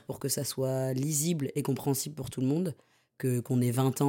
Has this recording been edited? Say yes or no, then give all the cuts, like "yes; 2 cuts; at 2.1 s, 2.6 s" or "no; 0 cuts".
no; 0 cuts